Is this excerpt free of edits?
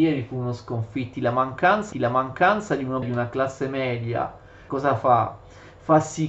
no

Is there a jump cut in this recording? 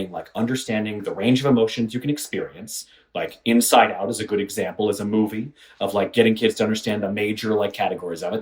no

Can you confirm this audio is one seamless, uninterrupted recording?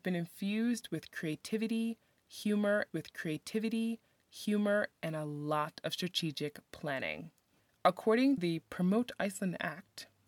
no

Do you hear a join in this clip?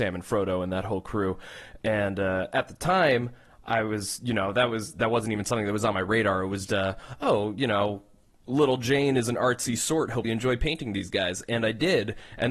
yes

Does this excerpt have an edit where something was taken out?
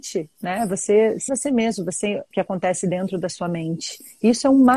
yes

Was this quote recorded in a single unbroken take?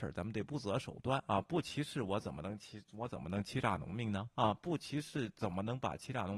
no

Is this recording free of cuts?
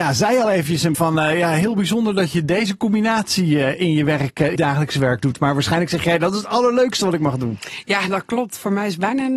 no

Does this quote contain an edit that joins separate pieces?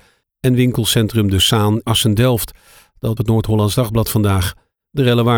yes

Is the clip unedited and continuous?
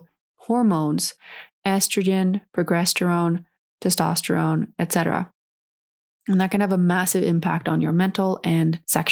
yes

